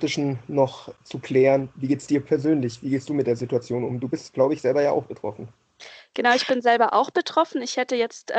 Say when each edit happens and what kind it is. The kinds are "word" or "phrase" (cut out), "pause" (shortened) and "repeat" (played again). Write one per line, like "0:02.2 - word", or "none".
none

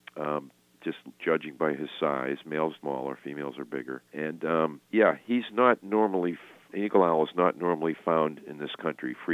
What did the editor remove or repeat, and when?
0:02.8 - phrase
0:04.1 - pause
0:04.9 - pause
0:06.7 - word

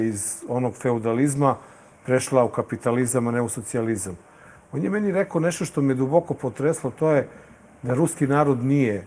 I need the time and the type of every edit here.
none

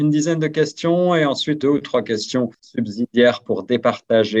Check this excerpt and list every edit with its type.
0:01.6 - phrase

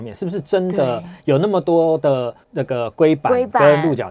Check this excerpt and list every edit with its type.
0:02.4 - pause

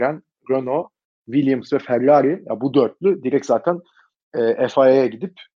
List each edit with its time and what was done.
none

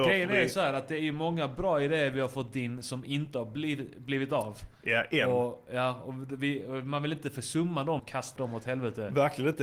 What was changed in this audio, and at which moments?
0:08.0 - word
0:08.4 - word

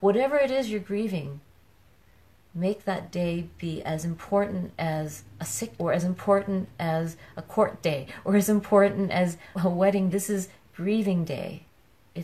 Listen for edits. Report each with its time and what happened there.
0:05.8 - word
0:09.5 - word
0:10.1 - word

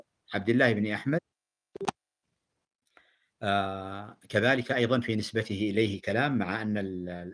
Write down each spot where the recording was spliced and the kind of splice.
none

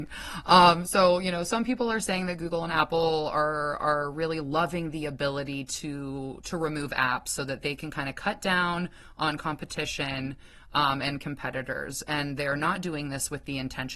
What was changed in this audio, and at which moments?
none

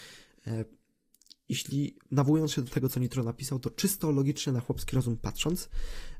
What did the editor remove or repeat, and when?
none

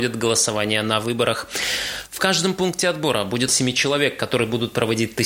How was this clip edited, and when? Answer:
0:03.5 - phrase

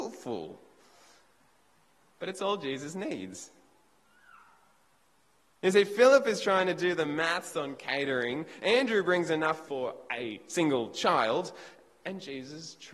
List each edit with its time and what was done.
0:09.6 - word

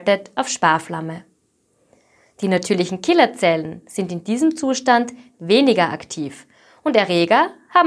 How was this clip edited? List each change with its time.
none

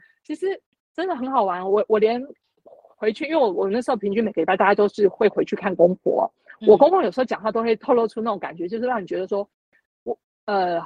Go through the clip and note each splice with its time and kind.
none

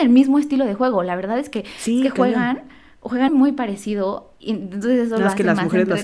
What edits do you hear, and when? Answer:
0:03.3 - word

